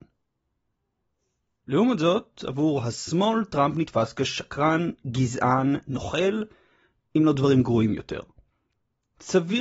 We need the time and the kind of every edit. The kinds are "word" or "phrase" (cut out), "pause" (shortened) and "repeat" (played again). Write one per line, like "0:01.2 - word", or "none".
none